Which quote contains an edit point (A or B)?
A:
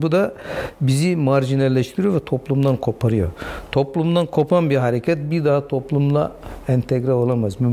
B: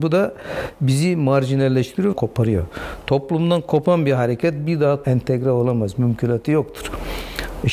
B